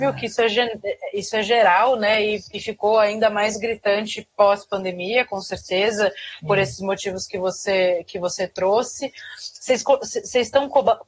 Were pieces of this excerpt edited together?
no; 0 cuts

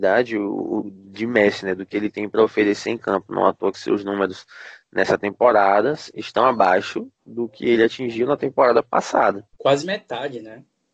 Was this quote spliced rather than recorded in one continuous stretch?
yes; 2 cuts; at 7.1 s, 9.5 s

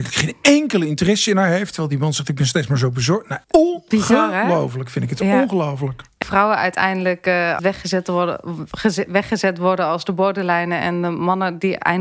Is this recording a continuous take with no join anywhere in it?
no; 3 cuts; at 3.4 s, 6.2 s, 7.6 s

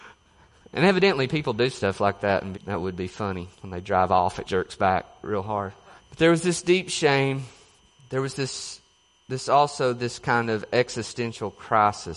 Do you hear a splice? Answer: yes; 5 cuts; at 2.5 s, 3.5 s, 4.4 s, 6.0 s, 7.8 s

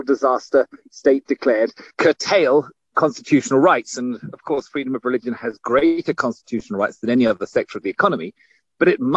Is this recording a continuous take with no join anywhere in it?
no; 1 cut; at 1.9 s

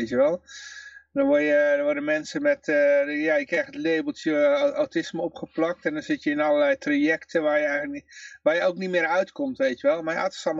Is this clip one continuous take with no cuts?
yes; 0 cuts

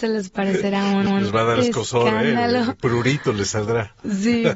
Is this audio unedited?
no; 1 cut; at 1.1 s

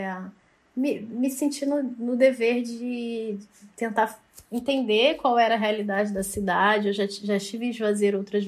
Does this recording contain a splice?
yes; 1 cut; at 4.4 s

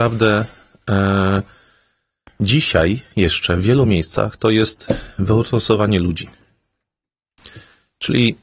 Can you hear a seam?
no; 0 cuts

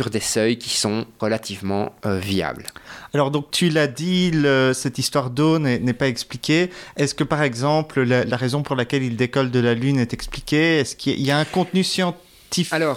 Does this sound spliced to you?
no; 0 cuts

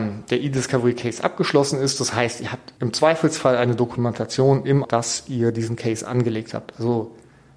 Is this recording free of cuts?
no; 2 cuts; at 2.8 s, 4.8 s

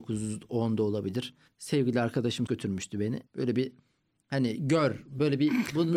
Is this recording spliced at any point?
yes; 3 cuts; at 1.5 s, 2.5 s, 3.3 s

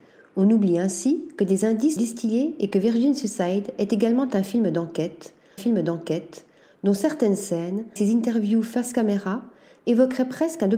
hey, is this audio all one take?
no; 3 cuts; at 2.0 s, 5.6 s, 8.0 s

